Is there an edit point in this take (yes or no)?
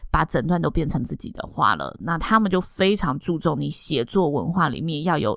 no